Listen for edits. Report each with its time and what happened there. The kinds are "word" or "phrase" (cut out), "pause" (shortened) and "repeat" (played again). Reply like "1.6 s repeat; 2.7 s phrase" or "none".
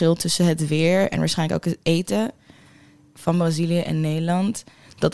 none